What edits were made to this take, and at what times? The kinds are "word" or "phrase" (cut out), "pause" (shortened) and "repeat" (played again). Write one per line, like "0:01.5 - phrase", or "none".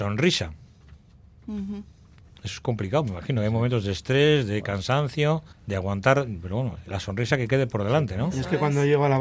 0:05.5 - pause